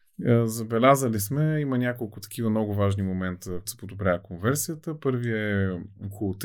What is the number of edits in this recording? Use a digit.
1